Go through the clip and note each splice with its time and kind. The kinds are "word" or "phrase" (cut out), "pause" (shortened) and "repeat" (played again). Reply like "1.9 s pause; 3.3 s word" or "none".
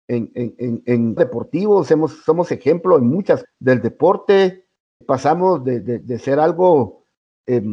1.2 s word; 3.4 s word; 5.0 s word; 6.0 s word